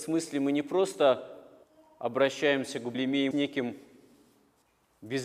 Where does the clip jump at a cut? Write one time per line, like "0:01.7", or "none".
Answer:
0:01.6
0:02.9
0:03.3